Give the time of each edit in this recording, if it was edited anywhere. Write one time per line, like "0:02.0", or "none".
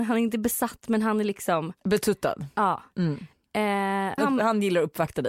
0:01.8
0:04.2